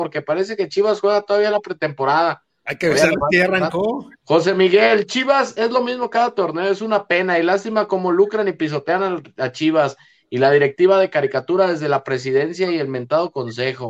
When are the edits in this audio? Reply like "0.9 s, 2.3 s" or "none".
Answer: 4.2 s